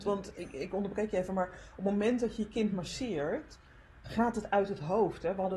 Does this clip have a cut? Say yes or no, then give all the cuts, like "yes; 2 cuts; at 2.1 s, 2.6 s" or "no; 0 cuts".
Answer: no; 0 cuts